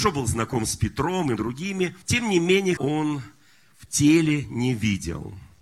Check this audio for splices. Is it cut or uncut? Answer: cut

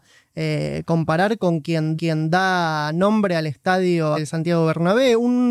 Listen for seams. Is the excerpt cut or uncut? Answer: cut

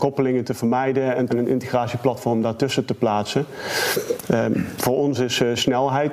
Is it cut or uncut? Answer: cut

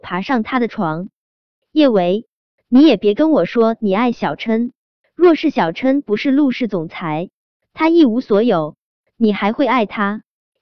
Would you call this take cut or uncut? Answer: uncut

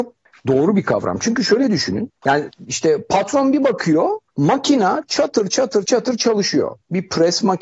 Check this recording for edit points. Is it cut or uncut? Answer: cut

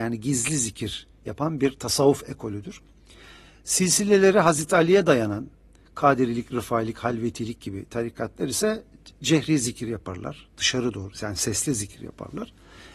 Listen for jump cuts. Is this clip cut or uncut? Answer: uncut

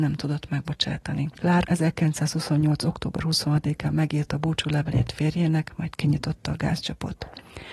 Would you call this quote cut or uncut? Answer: uncut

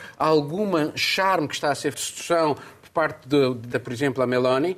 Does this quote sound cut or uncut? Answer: cut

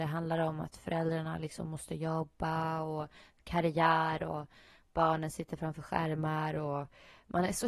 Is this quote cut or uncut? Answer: uncut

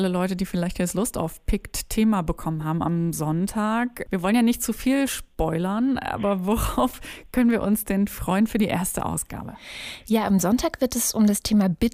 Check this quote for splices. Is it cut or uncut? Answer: uncut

